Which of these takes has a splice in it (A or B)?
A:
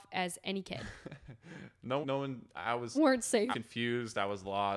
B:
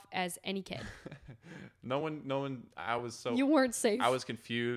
A